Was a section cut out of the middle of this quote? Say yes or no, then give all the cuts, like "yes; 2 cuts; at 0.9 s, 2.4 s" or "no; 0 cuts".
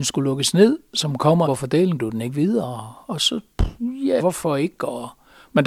yes; 3 cuts; at 1.5 s, 2.0 s, 4.2 s